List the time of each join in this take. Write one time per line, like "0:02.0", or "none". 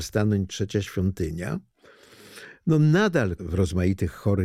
0:03.4